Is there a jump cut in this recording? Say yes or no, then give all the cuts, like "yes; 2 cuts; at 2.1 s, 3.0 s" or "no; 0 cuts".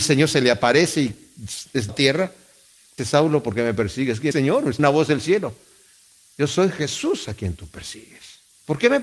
yes; 4 cuts; at 1.9 s, 3.0 s, 4.3 s, 4.8 s